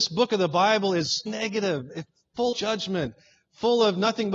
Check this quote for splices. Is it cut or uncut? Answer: cut